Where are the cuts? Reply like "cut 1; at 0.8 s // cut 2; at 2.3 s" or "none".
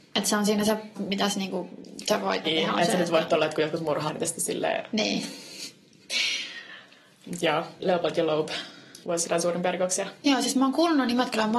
cut 1; at 0.9 s // cut 2; at 2.4 s // cut 3; at 4.1 s // cut 4; at 7.8 s // cut 5; at 9.0 s

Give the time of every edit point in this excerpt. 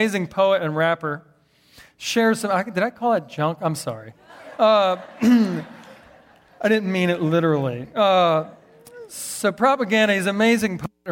none

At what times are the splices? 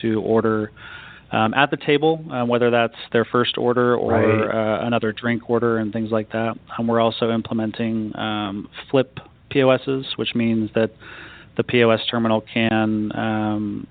none

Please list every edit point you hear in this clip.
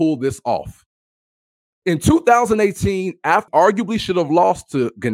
cut 1; at 3.5 s

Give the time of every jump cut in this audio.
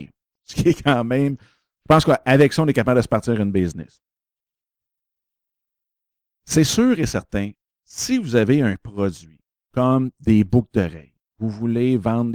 none

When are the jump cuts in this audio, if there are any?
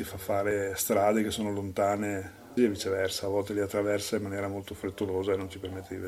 cut 1; at 2.6 s

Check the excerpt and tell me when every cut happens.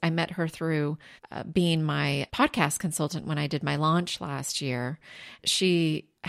cut 1; at 1.2 s // cut 2; at 2.3 s // cut 3; at 5.4 s

